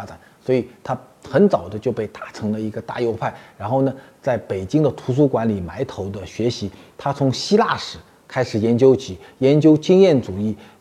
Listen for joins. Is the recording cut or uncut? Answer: uncut